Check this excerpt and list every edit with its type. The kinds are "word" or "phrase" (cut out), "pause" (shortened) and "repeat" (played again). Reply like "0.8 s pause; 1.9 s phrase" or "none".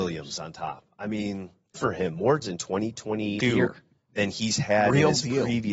1.7 s word; 2.4 s word; 3.4 s word